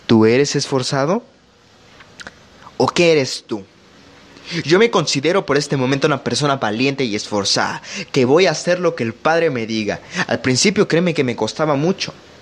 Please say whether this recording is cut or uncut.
uncut